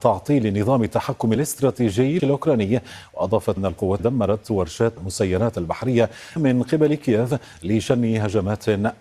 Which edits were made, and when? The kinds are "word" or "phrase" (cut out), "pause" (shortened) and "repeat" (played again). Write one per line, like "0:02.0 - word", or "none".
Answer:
0:01.4 - word
0:02.2 - word
0:03.6 - word
0:04.0 - word
0:05.0 - word
0:06.4 - word